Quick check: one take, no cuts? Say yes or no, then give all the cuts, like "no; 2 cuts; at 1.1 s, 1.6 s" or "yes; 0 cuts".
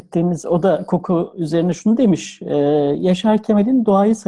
yes; 0 cuts